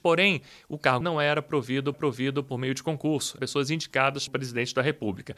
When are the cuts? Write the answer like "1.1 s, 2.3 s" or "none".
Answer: 1.0 s, 1.9 s, 3.4 s, 4.3 s